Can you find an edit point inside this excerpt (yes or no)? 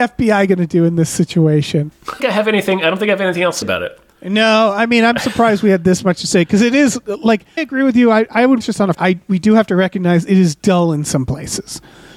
yes